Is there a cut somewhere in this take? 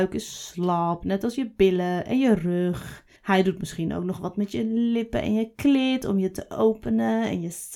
yes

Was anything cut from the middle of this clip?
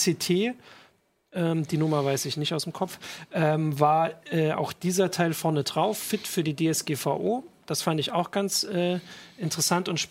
no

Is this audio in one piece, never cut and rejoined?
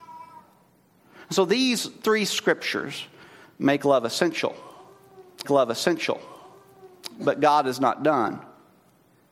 no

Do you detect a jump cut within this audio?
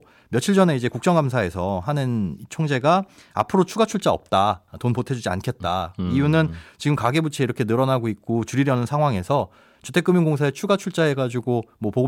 no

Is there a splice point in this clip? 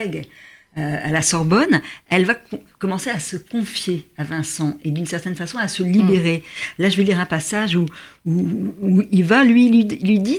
no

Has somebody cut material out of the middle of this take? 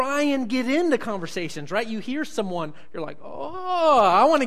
no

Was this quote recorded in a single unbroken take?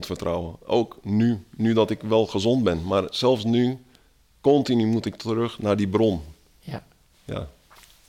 yes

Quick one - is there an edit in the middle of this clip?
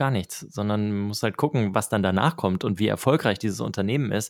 no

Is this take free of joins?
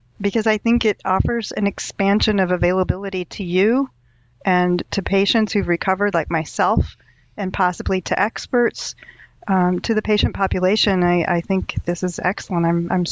yes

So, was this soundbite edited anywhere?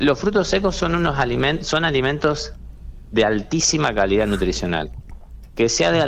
no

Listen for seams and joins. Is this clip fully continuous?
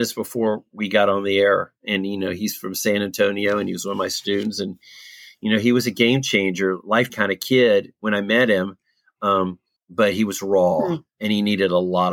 no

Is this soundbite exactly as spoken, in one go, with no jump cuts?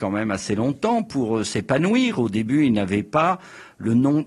yes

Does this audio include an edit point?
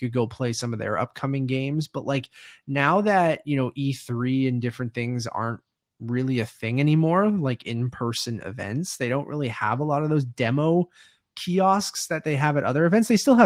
no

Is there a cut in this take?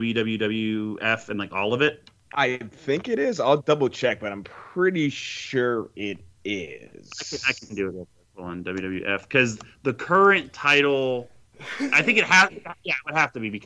no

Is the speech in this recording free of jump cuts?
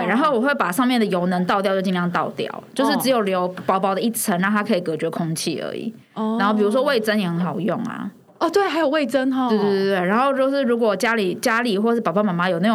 yes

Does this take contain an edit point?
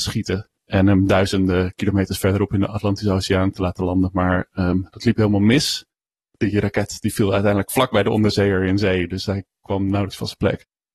no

